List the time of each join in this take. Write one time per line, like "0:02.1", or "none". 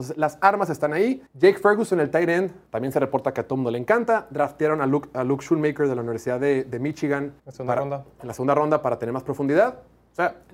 0:01.3
0:02.7
0:07.4